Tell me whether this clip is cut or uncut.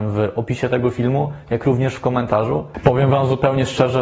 uncut